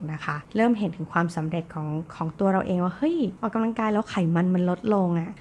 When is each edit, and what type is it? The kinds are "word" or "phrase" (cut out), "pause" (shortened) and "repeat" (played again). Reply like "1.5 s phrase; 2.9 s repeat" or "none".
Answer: none

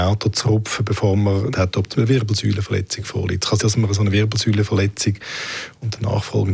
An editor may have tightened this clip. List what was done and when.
1.5 s phrase; 2.0 s word; 3.6 s word

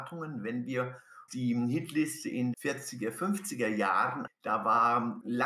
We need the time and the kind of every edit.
1.3 s word; 2.5 s word; 4.3 s word

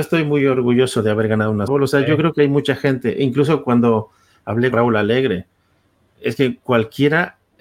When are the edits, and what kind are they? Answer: 1.7 s word; 4.7 s word

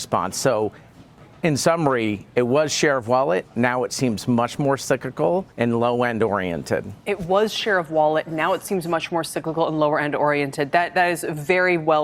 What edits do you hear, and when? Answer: 5.5 s pause

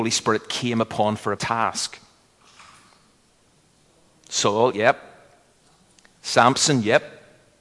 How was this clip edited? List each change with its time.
1.4 s word

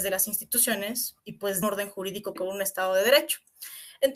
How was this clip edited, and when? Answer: 1.2 s pause; 1.6 s phrase; 2.4 s word

